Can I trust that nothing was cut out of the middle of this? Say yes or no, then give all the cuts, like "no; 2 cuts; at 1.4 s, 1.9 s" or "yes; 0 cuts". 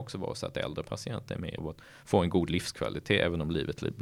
no; 1 cut; at 1.6 s